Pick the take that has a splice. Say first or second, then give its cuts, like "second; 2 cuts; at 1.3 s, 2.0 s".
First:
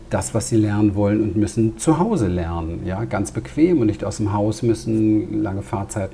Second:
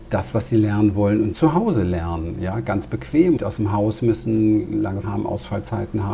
second; 3 cuts; at 1.3 s, 3.4 s, 5.0 s